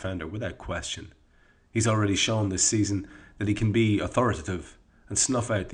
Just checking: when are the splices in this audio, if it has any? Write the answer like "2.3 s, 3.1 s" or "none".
none